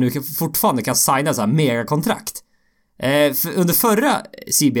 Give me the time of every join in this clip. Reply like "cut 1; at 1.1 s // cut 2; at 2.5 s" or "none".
none